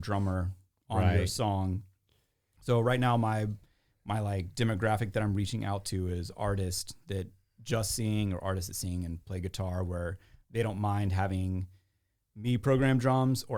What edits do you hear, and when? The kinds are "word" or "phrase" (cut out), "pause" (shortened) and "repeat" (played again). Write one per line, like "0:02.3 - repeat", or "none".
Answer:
none